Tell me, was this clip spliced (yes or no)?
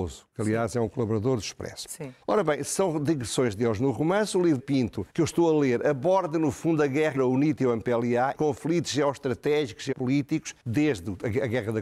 yes